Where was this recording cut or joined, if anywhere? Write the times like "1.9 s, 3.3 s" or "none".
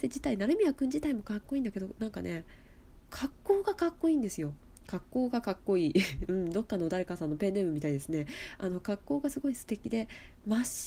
none